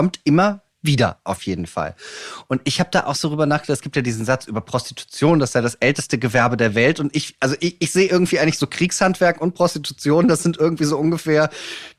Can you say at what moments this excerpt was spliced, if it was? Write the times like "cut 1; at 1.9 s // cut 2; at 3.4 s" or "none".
none